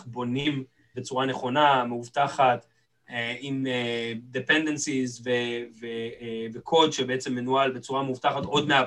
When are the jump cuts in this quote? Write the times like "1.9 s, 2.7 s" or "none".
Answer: 0.9 s